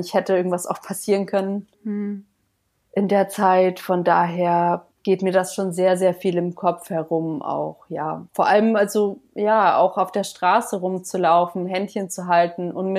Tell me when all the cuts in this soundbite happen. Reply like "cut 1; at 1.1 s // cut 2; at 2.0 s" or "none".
cut 1; at 1.7 s // cut 2; at 4.9 s // cut 3; at 8.3 s